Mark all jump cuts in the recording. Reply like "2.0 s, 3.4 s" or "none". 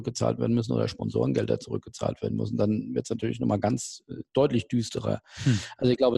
none